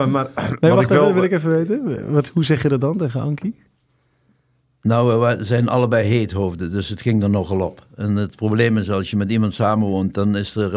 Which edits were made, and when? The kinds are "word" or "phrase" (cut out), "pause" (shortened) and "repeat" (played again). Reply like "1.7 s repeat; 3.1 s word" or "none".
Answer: none